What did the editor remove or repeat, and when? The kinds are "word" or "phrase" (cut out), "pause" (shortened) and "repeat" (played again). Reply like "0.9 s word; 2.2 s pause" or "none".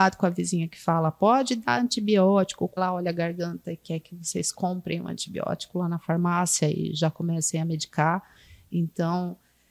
2.8 s phrase